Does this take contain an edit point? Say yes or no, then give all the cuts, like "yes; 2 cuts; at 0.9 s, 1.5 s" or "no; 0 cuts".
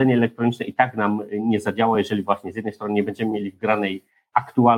no; 0 cuts